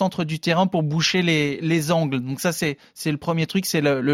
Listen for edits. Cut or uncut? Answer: uncut